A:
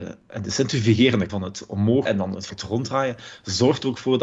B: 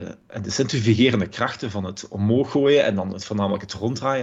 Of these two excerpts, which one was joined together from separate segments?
A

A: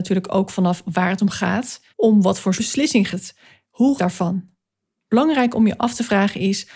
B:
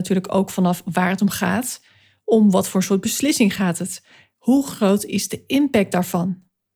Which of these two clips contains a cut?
A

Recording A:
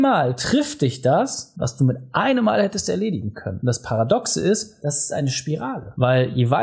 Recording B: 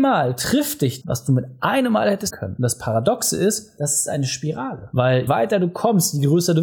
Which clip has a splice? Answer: B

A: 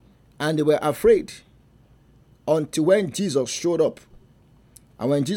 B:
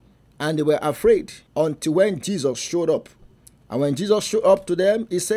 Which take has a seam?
B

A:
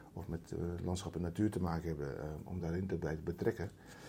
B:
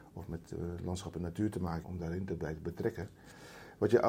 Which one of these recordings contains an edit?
B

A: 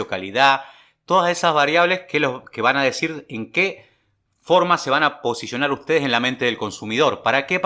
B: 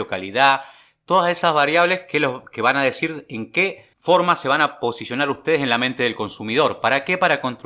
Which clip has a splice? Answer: B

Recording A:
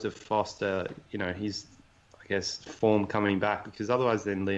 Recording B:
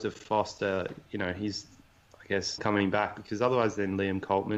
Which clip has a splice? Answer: B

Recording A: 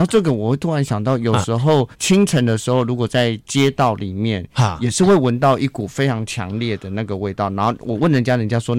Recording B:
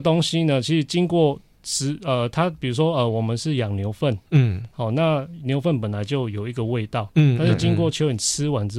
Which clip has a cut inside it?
A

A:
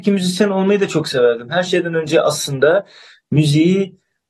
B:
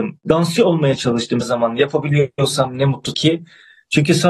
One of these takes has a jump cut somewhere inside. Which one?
B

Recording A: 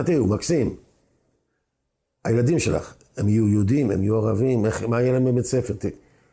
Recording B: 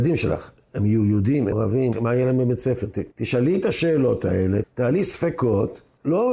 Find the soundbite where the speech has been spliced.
B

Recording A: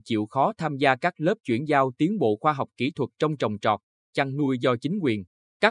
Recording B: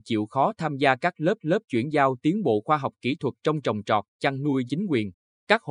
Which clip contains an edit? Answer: B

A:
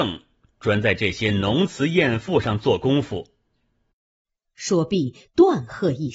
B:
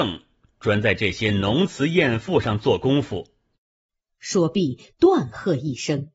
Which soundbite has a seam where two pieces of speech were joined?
B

